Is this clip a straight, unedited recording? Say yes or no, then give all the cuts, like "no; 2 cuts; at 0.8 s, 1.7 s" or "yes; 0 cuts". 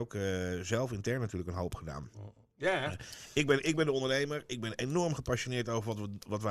yes; 0 cuts